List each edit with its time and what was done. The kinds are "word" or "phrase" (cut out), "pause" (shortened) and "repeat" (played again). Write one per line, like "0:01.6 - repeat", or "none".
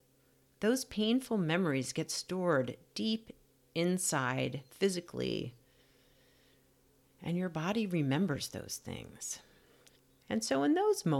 0:04.7 - pause
0:09.9 - pause